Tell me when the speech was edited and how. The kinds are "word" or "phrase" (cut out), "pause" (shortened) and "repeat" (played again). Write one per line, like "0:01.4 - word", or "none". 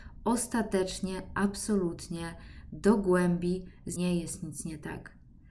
0:04.0 - word